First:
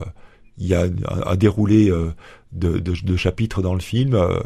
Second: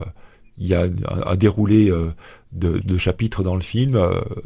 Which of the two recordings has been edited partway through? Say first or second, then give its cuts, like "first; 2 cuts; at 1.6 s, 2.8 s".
second; 1 cut; at 2.8 s